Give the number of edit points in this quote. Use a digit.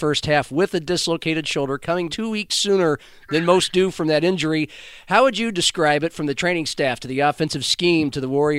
1